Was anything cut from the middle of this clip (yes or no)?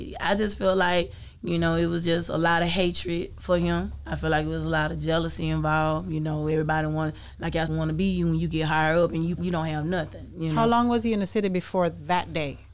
yes